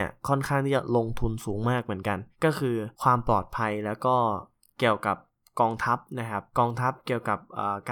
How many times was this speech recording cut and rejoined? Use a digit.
3